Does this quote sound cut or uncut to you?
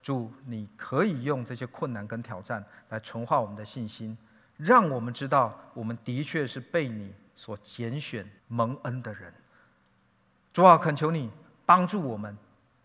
cut